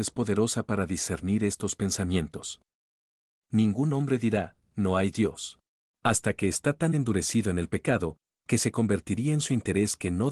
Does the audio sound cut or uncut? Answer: cut